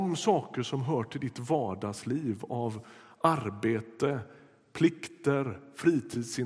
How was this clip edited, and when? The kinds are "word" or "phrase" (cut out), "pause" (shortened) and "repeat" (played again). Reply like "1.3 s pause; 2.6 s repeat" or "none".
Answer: none